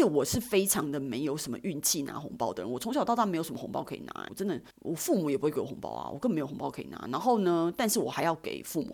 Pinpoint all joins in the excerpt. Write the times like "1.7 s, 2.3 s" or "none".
4.3 s, 4.7 s